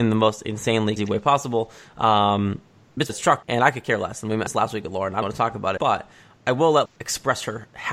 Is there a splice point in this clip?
yes; 7 cuts; at 1.0 s, 3.1 s, 3.4 s, 4.5 s, 5.2 s, 5.8 s, 6.9 s

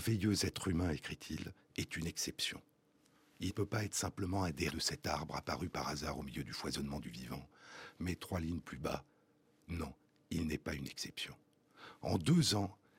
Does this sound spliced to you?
yes; 2 cuts; at 3.5 s, 4.7 s

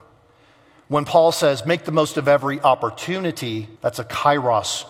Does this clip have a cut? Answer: yes; 1 cut; at 3.8 s

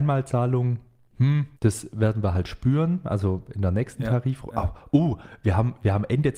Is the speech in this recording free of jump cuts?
no; 1 cut; at 1.6 s

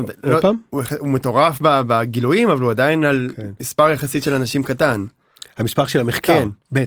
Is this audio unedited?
yes; 0 cuts

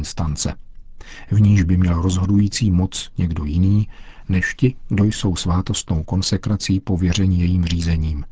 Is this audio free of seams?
yes; 0 cuts

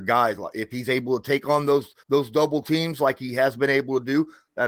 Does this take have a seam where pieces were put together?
yes; 1 cut; at 2.0 s

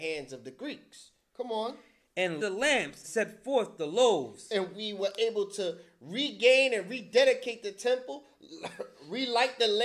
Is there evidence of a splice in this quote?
yes; 2 cuts; at 2.4 s, 3.0 s

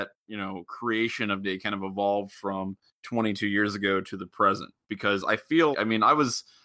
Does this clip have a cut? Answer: yes; 2 cuts; at 1.4 s, 5.7 s

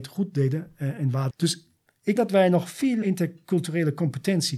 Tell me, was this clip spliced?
yes; 3 cuts; at 1.3 s, 2.2 s, 3.0 s

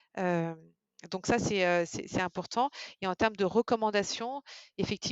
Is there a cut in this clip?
no; 0 cuts

